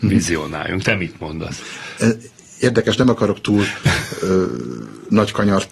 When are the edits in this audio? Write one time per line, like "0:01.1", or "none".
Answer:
none